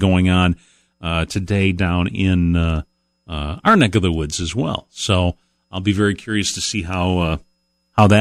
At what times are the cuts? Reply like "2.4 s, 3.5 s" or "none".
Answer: none